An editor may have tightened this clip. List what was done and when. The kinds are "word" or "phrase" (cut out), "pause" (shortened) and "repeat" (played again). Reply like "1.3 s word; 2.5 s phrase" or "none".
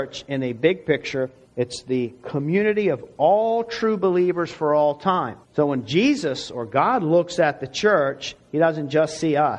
1.4 s pause; 5.4 s pause

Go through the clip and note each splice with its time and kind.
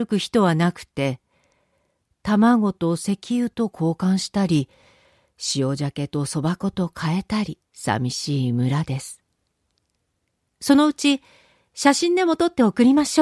7.7 s pause

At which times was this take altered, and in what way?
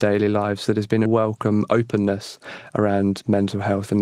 1.1 s phrase

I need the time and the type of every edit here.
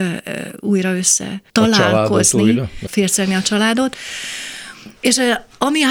1.5 s pause; 2.9 s phrase; 5.0 s pause

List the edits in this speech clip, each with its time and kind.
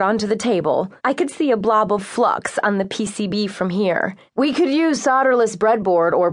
1.0 s pause; 4.3 s pause

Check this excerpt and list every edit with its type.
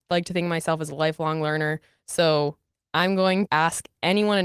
3.5 s word

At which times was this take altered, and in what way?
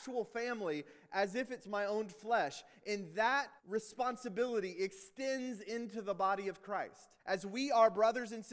3.6 s pause; 7.2 s pause

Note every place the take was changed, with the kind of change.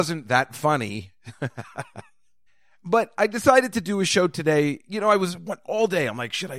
2.5 s pause

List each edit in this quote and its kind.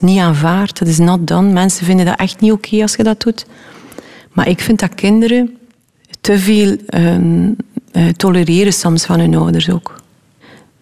none

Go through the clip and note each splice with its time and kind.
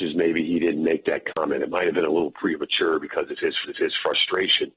3.6 s repeat

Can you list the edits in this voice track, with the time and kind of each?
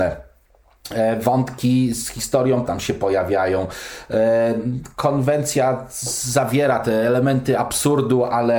2.6 s phrase

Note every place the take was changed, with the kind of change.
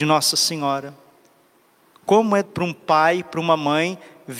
2.4 s word

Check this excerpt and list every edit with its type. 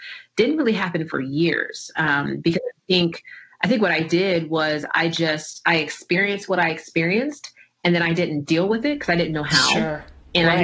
none

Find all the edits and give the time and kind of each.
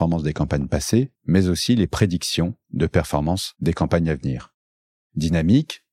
1.2 s pause

